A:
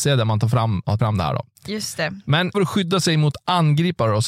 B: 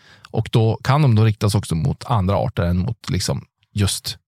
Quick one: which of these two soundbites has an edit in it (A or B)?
A